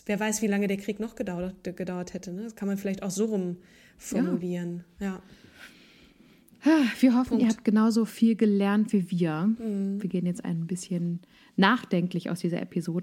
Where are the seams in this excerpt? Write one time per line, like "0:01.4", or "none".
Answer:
none